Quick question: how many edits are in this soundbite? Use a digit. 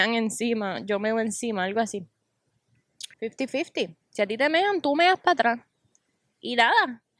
1